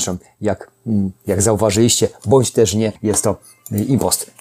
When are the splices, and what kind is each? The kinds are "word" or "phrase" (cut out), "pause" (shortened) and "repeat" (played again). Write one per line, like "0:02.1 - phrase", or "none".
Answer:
0:03.0 - pause